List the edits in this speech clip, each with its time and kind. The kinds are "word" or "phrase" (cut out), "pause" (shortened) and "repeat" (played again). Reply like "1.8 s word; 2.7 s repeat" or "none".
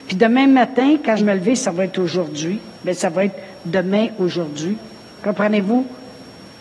1.2 s phrase; 2.8 s pause